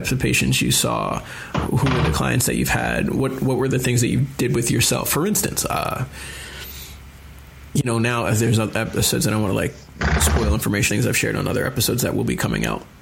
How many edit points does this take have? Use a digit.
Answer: 1